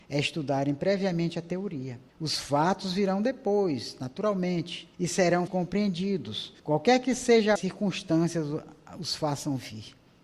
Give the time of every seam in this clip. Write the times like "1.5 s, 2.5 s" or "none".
2.1 s, 4.9 s, 5.5 s, 6.6 s, 7.6 s